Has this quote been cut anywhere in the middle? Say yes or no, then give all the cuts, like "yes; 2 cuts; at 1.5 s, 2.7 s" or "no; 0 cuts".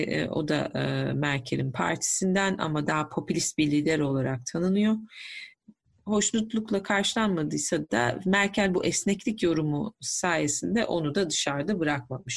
no; 0 cuts